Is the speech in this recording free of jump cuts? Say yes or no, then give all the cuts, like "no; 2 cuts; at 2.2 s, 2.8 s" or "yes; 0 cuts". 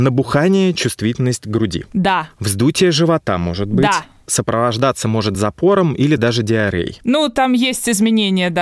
yes; 0 cuts